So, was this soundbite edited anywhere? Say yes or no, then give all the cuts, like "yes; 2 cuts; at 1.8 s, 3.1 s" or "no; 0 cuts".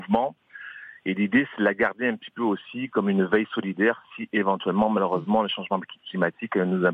no; 0 cuts